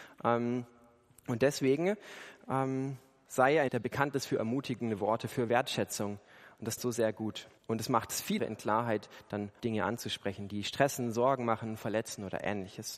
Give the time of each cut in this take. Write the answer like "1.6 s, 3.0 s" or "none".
3.3 s, 3.7 s, 6.8 s, 7.6 s, 8.4 s, 9.6 s